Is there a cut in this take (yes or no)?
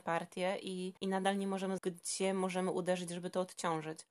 yes